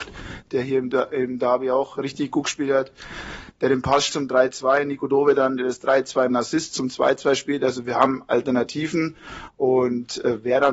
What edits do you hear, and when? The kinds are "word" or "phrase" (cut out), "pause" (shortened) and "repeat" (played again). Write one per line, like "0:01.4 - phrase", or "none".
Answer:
0:04.1 - word
0:06.3 - phrase